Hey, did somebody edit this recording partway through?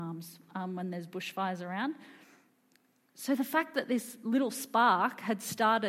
no; 0 cuts

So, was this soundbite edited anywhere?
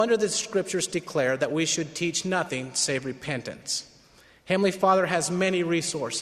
no; 0 cuts

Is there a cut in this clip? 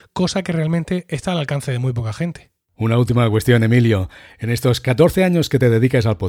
no; 0 cuts

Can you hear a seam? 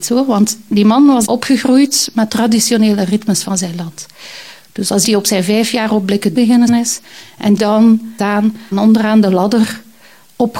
yes; 8 cuts; at 1.2 s, 2.3 s, 5.0 s, 6.3 s, 6.7 s, 7.6 s, 8.2 s, 8.7 s

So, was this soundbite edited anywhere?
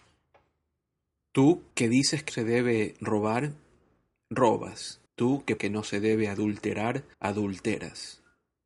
yes; 5 cuts; at 1.7 s, 2.3 s, 5.1 s, 5.6 s, 7.1 s

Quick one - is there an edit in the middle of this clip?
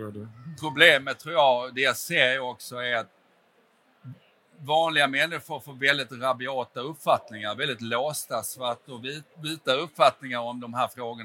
yes; 1 cut; at 9.3 s

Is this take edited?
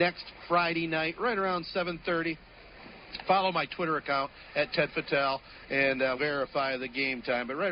yes; 1 cut; at 6.2 s

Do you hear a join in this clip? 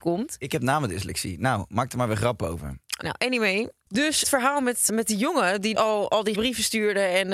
yes; 5 cuts; at 3.0 s, 4.2 s, 4.9 s, 5.7 s, 6.3 s

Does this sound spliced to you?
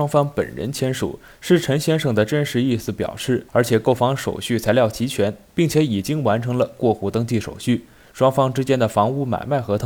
yes; 1 cut; at 3.5 s

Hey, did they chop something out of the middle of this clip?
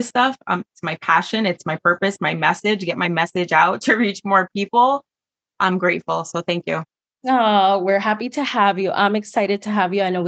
no; 0 cuts

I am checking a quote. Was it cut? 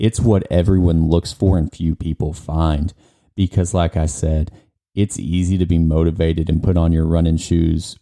no; 0 cuts

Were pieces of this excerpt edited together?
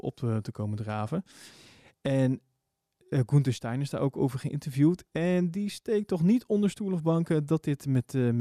no; 0 cuts

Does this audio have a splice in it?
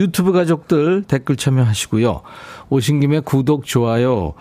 no; 0 cuts

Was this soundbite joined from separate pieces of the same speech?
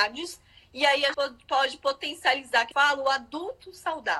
yes; 2 cuts; at 1.1 s, 2.7 s

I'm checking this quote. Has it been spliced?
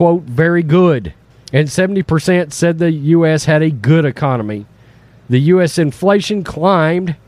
yes; 1 cut; at 1.3 s

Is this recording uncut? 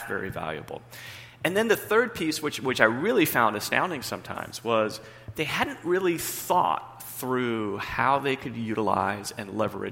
yes; 0 cuts

